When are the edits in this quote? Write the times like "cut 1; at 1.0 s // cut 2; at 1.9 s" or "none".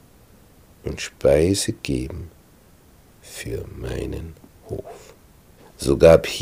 none